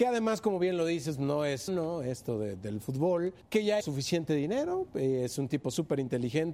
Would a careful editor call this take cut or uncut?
cut